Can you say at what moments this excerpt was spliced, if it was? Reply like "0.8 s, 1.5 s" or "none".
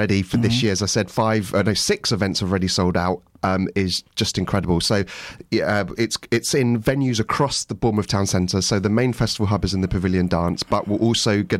4.1 s